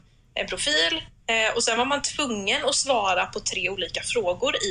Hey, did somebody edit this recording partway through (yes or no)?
no